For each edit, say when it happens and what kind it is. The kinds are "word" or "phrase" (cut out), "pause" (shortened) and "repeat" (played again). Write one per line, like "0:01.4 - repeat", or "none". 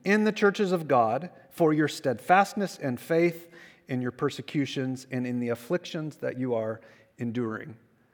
none